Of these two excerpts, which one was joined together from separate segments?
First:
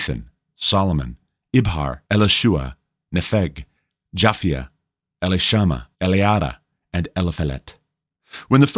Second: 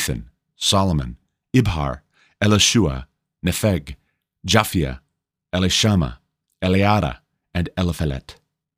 first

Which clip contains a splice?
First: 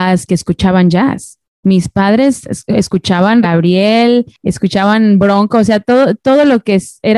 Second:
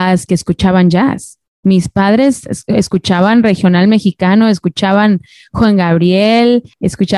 first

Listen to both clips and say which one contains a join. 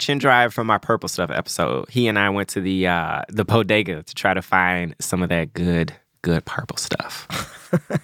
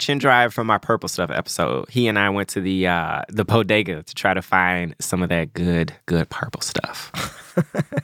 second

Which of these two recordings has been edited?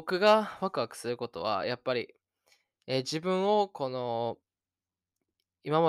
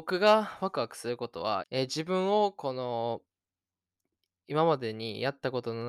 second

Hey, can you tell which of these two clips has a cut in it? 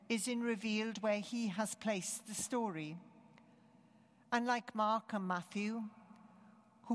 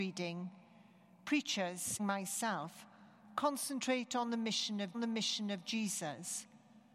second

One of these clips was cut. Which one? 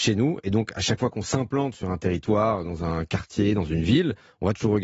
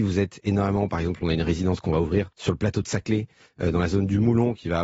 second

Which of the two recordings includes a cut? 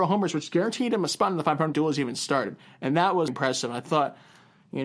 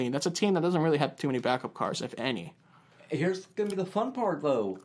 first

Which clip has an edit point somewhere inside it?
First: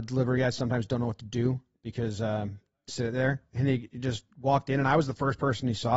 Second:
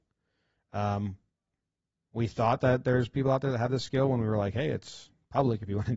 first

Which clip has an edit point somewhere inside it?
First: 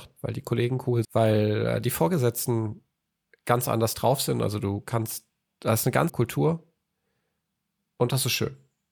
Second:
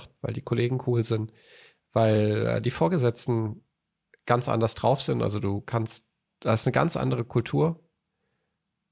first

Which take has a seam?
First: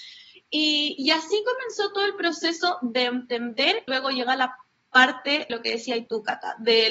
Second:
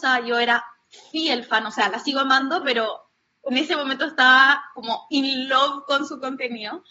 first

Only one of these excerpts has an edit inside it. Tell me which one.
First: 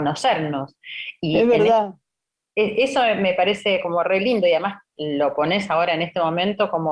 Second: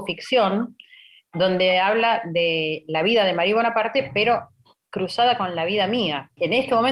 first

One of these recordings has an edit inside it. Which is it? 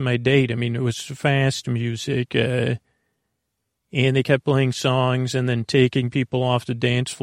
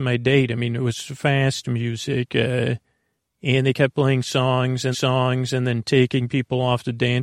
second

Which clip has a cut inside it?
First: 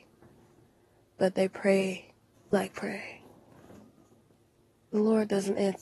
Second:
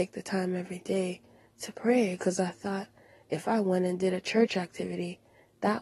first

